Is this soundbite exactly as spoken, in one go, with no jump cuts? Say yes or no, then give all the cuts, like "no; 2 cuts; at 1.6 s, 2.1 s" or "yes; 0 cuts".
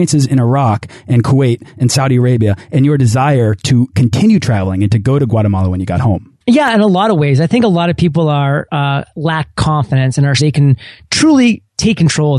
no; 2 cuts; at 6.4 s, 10.4 s